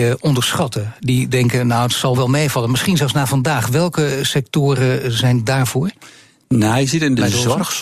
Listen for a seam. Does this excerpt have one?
yes; 2 cuts; at 2.1 s, 5.7 s

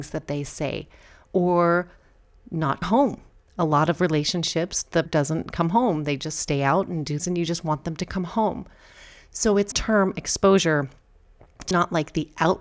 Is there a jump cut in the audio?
yes; 5 cuts; at 2.8 s, 5.1 s, 7.2 s, 9.7 s, 11.7 s

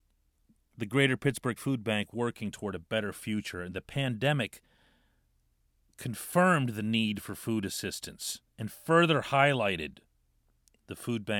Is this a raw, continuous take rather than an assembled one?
no; 2 cuts; at 1.6 s, 2.1 s

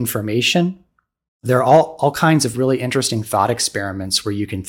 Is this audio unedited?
yes; 0 cuts

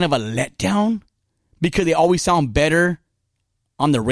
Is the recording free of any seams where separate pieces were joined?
yes; 0 cuts

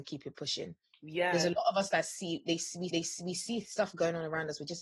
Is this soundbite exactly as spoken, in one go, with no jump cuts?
no; 1 cut; at 2.9 s

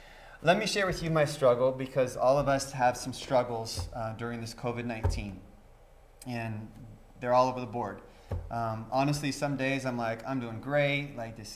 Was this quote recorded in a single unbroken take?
yes; 0 cuts

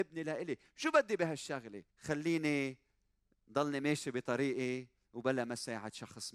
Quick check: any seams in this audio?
yes; 1 cut; at 1.9 s

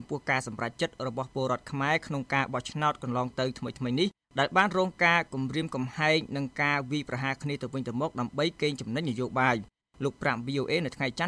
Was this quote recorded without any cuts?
yes; 0 cuts

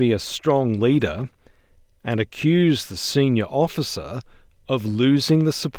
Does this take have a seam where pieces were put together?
no; 0 cuts

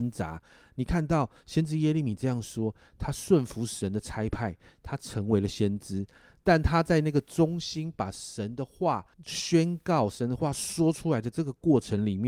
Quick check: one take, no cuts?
no; 1 cut; at 9.1 s

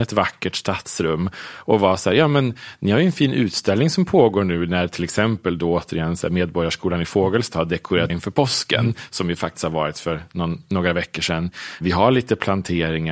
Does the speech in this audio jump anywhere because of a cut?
yes; 1 cut; at 8.1 s

